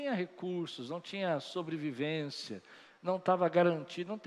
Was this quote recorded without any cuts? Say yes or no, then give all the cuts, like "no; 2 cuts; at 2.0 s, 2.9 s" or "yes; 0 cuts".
yes; 0 cuts